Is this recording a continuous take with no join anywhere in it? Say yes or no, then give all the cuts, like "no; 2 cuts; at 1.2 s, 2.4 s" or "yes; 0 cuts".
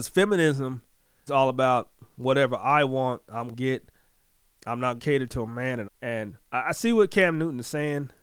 no; 5 cuts; at 1.3 s, 3.5 s, 4.5 s, 5.0 s, 5.8 s